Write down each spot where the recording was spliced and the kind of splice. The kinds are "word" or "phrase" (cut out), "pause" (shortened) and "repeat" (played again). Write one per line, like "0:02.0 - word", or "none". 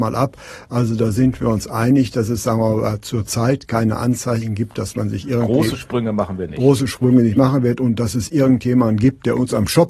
none